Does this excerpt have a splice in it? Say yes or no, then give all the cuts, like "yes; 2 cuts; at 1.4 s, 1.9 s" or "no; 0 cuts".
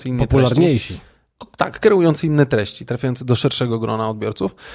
no; 0 cuts